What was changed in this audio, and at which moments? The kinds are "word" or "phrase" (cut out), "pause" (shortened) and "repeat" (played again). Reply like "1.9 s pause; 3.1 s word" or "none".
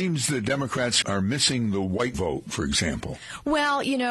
1.0 s word; 2.1 s word